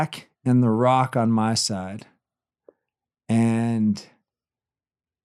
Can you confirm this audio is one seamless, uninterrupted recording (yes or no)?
yes